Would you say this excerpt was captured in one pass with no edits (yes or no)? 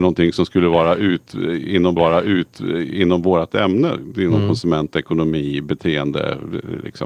no